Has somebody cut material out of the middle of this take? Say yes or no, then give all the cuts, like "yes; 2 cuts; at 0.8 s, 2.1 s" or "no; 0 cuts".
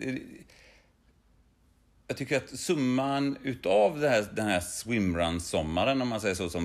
no; 0 cuts